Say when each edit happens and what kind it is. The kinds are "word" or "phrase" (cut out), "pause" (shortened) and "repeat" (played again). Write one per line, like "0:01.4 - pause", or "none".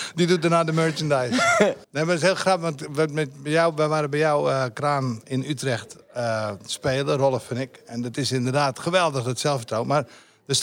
0:01.8 - pause